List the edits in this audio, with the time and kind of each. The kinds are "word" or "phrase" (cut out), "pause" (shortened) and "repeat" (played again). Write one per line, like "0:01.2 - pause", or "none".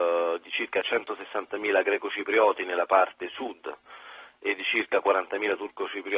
none

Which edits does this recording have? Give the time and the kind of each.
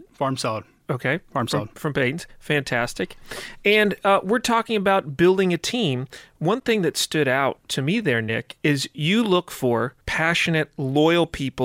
0:10.0 - pause

